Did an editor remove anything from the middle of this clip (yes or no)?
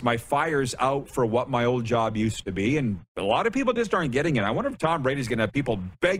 no